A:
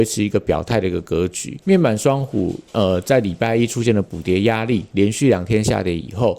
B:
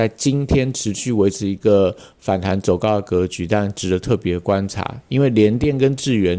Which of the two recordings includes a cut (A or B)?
A